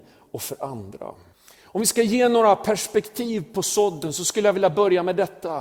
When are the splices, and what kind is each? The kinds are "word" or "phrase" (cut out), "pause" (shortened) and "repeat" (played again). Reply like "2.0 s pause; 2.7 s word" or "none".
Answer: 1.3 s pause